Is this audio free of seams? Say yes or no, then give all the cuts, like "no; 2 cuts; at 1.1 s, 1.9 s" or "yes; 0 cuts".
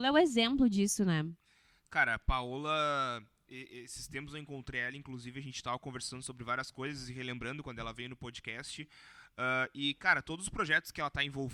yes; 0 cuts